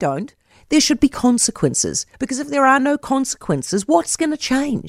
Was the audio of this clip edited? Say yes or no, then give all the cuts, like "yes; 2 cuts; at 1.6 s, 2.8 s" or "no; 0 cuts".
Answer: yes; 1 cut; at 2.1 s